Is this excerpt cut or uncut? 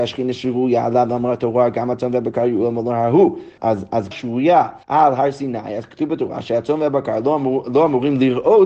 cut